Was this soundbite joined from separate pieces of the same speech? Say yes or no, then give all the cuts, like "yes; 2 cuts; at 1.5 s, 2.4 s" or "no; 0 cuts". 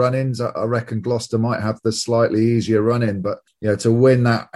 no; 0 cuts